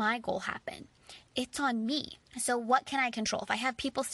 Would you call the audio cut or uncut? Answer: cut